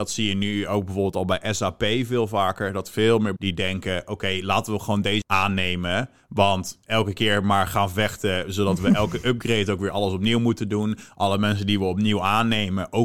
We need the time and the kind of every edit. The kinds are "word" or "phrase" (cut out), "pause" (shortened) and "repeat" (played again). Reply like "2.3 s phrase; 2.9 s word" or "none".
3.4 s word; 5.2 s word

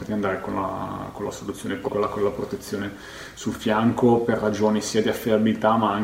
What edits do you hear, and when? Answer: 1.9 s phrase

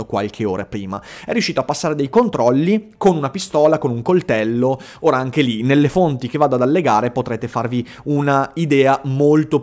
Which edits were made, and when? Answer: none

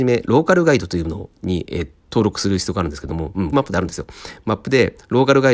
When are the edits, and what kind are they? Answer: 3.5 s word

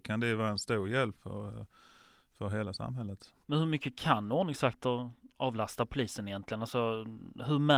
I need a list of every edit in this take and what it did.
1.1 s word; 3.4 s pause

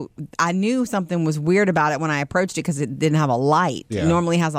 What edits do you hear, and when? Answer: none

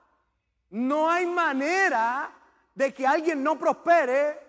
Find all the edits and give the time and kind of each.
none

